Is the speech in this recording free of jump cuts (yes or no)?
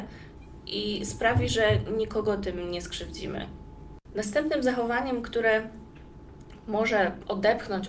yes